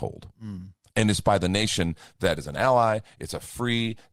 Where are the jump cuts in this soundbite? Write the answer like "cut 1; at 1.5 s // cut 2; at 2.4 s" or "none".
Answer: none